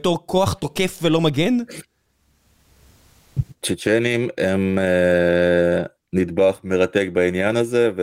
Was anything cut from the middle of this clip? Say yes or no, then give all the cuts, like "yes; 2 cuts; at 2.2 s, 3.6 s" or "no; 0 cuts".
no; 0 cuts